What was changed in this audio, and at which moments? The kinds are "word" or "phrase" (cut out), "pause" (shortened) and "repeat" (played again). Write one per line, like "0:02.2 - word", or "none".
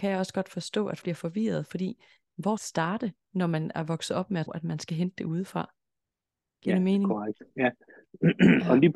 0:01.0 - word
0:02.6 - phrase
0:04.5 - word
0:07.5 - pause